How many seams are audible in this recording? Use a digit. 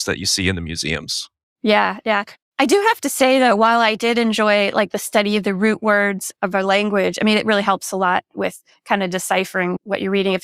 0